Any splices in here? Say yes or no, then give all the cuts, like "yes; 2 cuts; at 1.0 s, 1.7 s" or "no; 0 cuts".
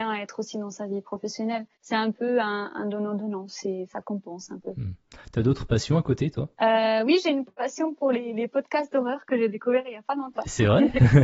yes; 2 cuts; at 1.7 s, 6.5 s